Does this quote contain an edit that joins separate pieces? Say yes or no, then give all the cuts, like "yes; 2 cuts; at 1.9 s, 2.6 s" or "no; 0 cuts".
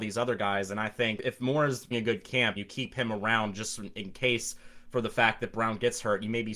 yes; 2 cuts; at 1.9 s, 2.6 s